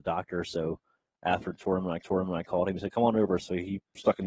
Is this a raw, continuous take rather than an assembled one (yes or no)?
no